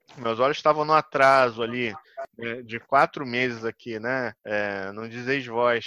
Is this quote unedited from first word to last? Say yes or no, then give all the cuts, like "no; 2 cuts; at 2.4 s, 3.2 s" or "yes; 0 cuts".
no; 1 cut; at 4.4 s